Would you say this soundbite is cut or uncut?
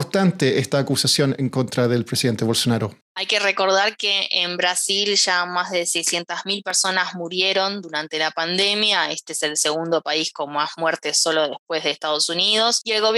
uncut